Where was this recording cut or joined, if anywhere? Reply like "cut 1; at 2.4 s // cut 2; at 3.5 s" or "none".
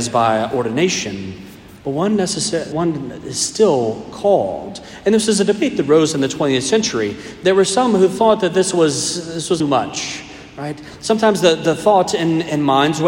cut 1; at 1.8 s // cut 2; at 2.7 s // cut 3; at 9.6 s